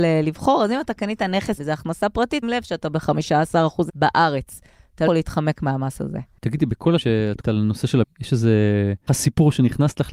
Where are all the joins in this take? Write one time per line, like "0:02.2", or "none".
0:01.6
0:02.4
0:03.9
0:05.1
0:07.0
0:07.4
0:08.0
0:09.1

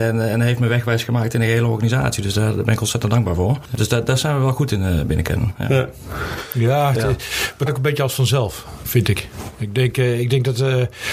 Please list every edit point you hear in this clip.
0:07.7

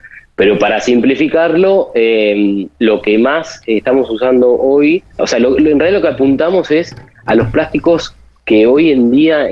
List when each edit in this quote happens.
0:05.2

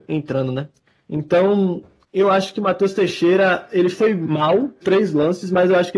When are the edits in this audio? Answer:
0:04.8

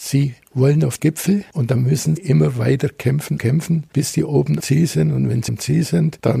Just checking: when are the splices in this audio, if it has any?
0:01.0
0:02.2
0:03.4
0:04.6
0:05.5

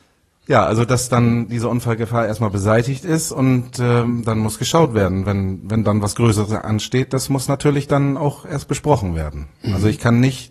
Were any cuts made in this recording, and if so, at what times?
none

